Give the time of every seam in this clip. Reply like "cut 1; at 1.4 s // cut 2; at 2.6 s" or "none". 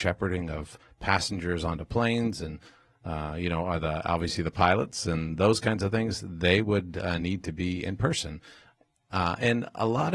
none